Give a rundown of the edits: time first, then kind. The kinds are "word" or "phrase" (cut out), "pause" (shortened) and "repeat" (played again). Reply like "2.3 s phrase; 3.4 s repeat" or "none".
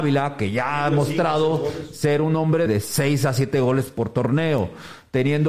2.7 s word

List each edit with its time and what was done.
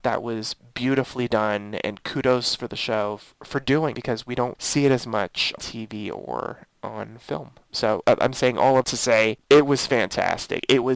1.8 s word; 3.9 s word; 4.5 s word; 5.6 s word; 8.0 s word; 8.8 s word

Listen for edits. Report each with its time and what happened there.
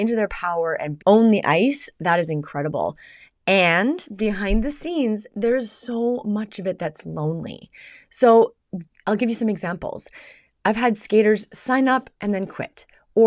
1.0 s phrase

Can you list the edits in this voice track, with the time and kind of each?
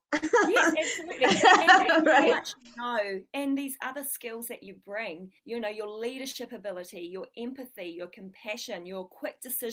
5.4 s pause

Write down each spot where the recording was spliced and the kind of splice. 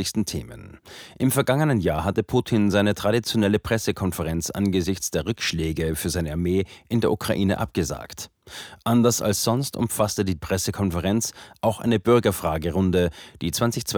10.4 s word

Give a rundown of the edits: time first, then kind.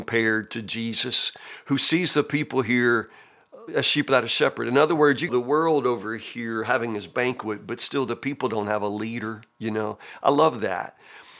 3.7 s word; 5.3 s phrase; 9.5 s pause

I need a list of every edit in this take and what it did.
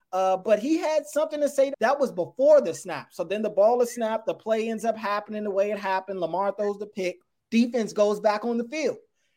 1.7 s phrase; 7.4 s pause

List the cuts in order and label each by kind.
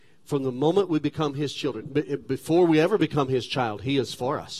none

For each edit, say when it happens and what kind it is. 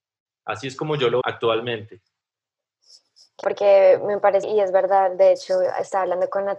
1.2 s word; 3.4 s word; 4.4 s word

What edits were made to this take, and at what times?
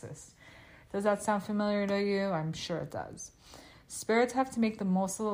none

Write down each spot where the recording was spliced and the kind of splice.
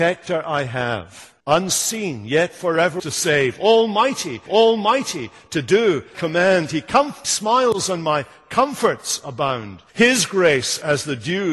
1.4 s pause; 3.0 s phrase; 4.5 s repeat; 6.1 s word; 7.2 s word; 9.9 s pause

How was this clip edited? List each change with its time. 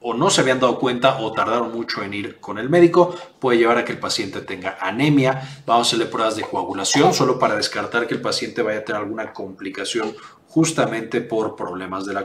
none

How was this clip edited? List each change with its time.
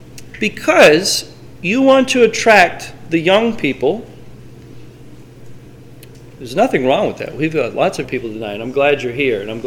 8.0 s word

